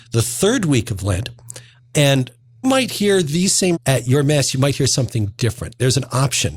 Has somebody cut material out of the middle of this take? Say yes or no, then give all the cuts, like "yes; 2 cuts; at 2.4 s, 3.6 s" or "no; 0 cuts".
yes; 2 cuts; at 2.6 s, 3.7 s